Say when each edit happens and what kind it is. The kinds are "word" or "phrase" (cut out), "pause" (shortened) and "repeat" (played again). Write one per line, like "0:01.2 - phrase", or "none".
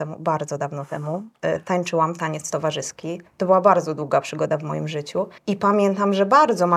0:03.3 - pause
0:05.4 - pause